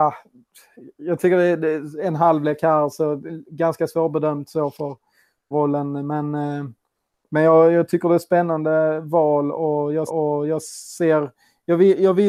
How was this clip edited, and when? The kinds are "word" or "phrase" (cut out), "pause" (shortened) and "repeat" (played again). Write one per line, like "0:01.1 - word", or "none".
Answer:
0:05.5 - phrase
0:10.1 - repeat